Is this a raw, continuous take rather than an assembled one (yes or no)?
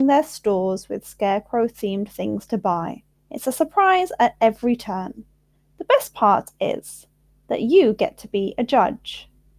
no